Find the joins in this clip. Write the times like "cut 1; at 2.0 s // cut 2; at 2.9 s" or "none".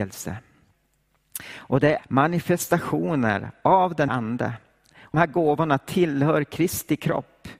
cut 1; at 2.0 s // cut 2; at 4.1 s // cut 3; at 5.1 s